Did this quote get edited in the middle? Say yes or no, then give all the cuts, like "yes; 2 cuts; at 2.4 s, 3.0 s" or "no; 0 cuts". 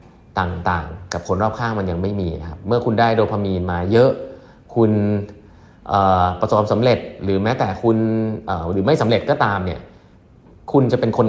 no; 0 cuts